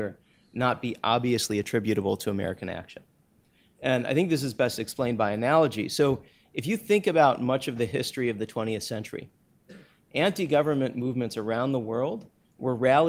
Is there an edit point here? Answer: no; 0 cuts

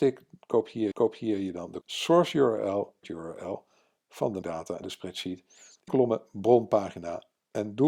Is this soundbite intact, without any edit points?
no; 6 cuts; at 0.9 s, 1.8 s, 3.0 s, 4.4 s, 4.8 s, 5.9 s

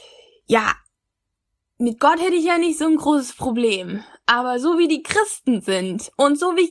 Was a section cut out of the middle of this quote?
no; 0 cuts

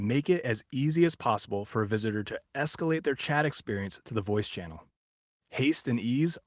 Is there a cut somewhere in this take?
no; 0 cuts

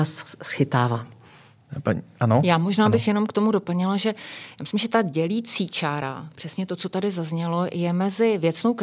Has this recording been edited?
no; 0 cuts

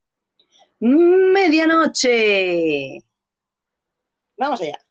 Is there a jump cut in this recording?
no; 0 cuts

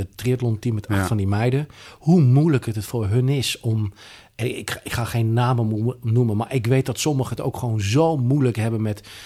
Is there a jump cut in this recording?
no; 0 cuts

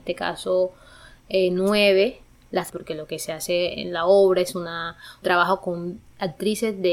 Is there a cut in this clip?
yes; 2 cuts; at 2.7 s, 5.2 s

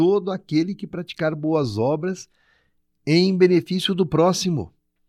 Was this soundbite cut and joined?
no; 0 cuts

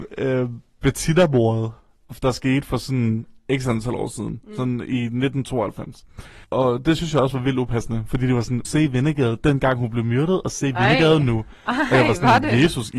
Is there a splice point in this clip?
yes; 2 cuts; at 6.4 s, 8.6 s

